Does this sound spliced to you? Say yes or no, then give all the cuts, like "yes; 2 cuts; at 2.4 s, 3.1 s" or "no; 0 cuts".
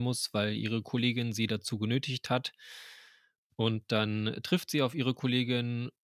no; 0 cuts